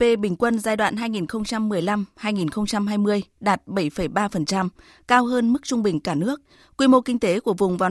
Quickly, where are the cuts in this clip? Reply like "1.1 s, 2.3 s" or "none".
none